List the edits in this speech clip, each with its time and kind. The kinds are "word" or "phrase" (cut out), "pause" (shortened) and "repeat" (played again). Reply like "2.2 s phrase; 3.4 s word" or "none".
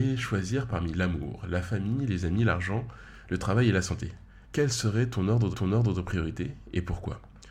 4.4 s pause; 5.5 s repeat